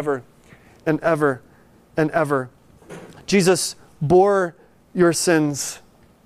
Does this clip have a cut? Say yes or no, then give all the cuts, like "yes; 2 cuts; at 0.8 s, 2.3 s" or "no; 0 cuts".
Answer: no; 0 cuts